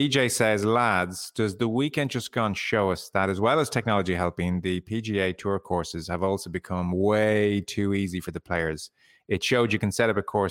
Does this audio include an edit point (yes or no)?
no